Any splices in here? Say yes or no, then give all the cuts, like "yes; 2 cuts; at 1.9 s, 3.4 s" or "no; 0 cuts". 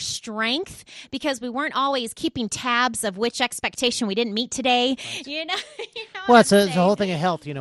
no; 0 cuts